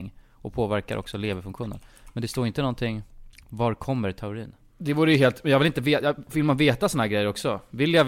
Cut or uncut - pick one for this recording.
cut